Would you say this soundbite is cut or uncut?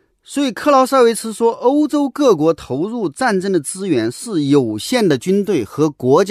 uncut